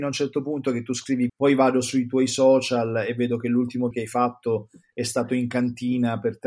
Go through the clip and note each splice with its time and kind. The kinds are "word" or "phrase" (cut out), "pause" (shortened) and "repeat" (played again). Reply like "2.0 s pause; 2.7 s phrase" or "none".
1.3 s word; 3.9 s word